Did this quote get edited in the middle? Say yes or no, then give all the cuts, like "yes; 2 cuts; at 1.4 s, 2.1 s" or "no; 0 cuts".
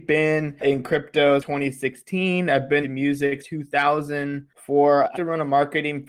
yes; 4 cuts; at 1.4 s, 2.8 s, 3.4 s, 5.1 s